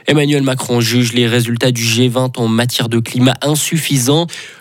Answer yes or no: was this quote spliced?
no